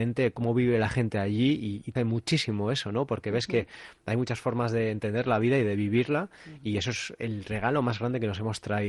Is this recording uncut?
no; 1 cut; at 1.9 s

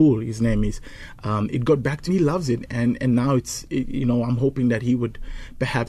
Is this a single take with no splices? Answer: no; 1 cut; at 2.1 s

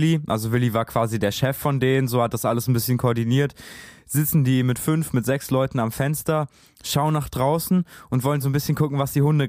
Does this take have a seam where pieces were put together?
no; 0 cuts

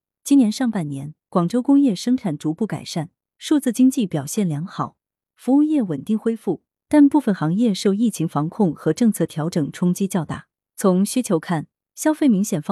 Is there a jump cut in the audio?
no; 0 cuts

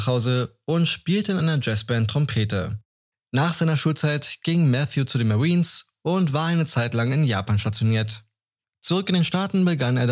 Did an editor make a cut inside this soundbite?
no; 0 cuts

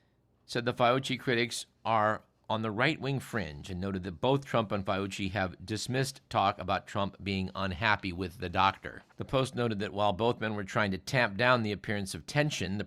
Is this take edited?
yes; 1 cut; at 9.1 s

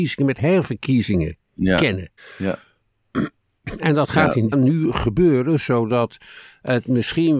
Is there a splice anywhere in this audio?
yes; 2 cuts; at 2.2 s, 4.5 s

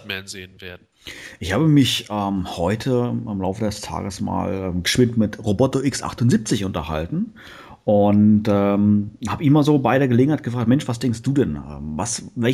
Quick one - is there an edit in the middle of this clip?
no; 0 cuts

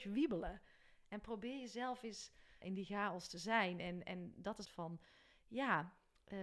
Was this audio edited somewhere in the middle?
yes; 2 cuts; at 2.6 s, 4.6 s

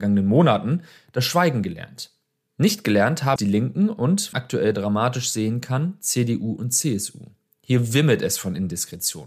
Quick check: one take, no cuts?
no; 2 cuts; at 3.4 s, 4.3 s

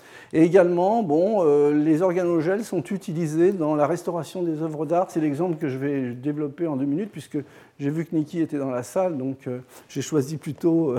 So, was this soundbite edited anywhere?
no; 0 cuts

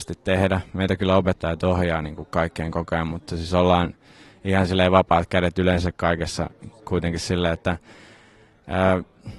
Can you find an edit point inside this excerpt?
no; 0 cuts

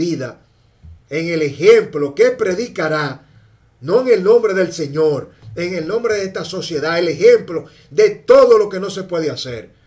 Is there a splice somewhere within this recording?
yes; 1 cut; at 1.0 s

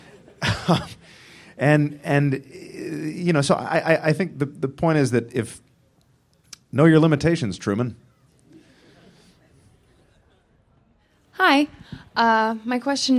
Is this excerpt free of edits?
yes; 0 cuts

